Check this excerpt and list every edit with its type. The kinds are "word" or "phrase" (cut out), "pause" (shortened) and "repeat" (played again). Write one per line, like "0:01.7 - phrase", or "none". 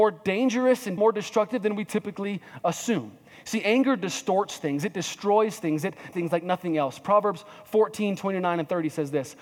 0:01.0 - word
0:06.1 - word